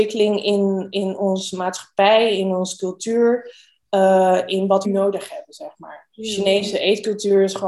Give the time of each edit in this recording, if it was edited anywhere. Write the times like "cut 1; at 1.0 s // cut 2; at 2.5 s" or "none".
cut 1; at 4.8 s